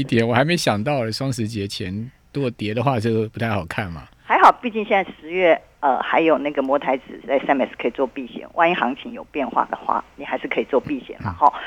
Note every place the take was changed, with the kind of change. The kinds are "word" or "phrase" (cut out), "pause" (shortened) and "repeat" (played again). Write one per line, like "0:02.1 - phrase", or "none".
none

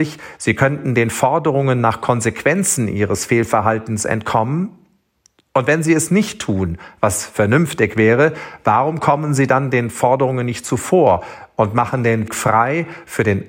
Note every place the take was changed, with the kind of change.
0:12.3 - word

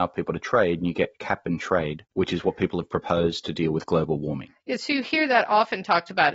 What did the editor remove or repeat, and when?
0:02.1 - pause

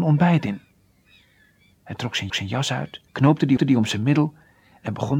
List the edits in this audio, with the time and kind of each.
0:02.3 - repeat
0:03.1 - pause
0:03.6 - repeat

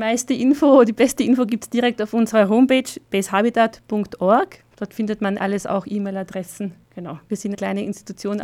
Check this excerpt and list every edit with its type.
0:04.7 - pause
0:05.4 - word
0:06.8 - pause
0:07.5 - word

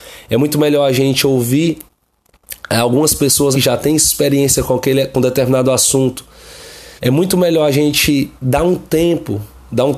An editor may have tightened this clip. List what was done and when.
0:03.5 - phrase
0:07.0 - pause

